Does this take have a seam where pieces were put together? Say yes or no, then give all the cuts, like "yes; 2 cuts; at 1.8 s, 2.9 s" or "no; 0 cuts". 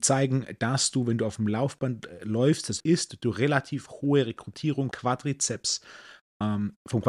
yes; 2 cuts; at 2.8 s, 4.9 s